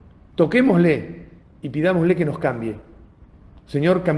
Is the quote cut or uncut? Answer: cut